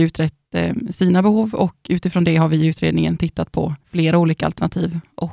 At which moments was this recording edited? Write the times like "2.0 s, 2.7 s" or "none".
3.8 s